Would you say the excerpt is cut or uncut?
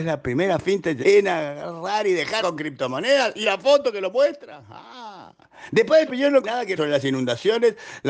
cut